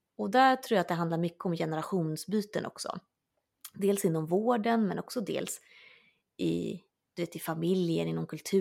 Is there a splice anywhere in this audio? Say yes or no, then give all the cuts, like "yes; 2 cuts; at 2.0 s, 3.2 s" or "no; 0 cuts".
no; 0 cuts